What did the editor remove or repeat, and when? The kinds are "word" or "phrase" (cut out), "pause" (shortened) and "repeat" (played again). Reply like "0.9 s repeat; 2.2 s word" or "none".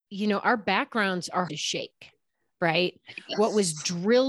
1.5 s word